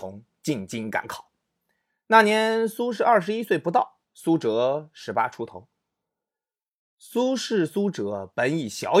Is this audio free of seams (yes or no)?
no